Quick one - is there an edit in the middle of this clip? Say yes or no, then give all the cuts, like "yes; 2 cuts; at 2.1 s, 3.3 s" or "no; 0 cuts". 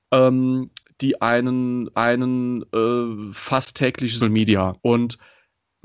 yes; 3 cuts; at 1.9 s, 4.2 s, 4.8 s